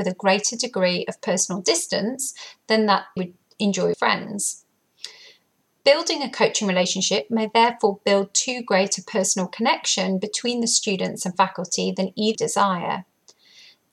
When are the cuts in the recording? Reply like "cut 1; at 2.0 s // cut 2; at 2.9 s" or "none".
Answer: cut 1; at 3.2 s // cut 2; at 3.9 s // cut 3; at 12.3 s